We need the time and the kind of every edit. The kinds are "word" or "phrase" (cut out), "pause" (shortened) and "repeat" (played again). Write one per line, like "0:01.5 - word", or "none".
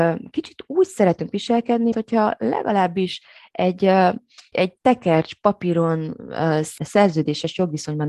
0:01.9 - word
0:04.5 - word

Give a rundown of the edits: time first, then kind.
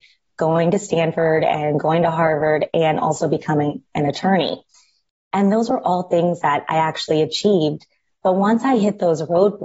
none

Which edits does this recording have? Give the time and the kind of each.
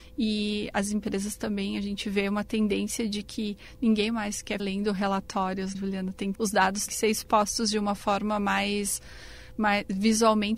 0:04.6 - word
0:05.7 - word
0:06.3 - word
0:06.9 - word

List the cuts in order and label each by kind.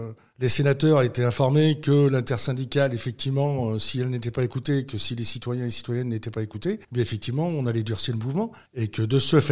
0:06.8 - pause

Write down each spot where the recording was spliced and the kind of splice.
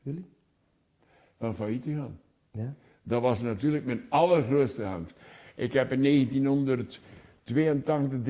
none

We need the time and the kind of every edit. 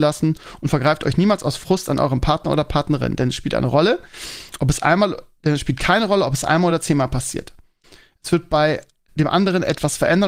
none

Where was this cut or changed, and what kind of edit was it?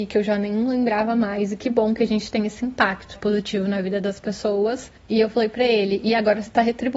0:03.2 - word
0:05.0 - pause

